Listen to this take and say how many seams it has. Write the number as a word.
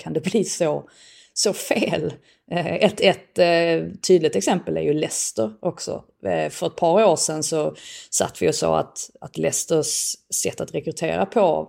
zero